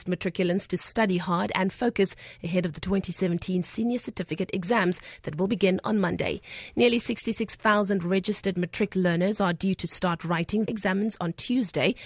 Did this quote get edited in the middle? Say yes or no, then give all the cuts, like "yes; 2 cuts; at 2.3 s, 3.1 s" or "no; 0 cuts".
yes; 1 cut; at 10.7 s